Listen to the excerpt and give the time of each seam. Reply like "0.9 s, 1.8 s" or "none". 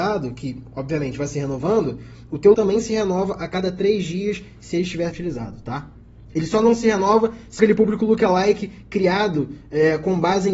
2.5 s, 5.1 s, 7.6 s